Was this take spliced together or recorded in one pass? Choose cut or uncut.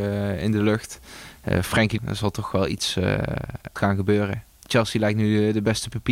cut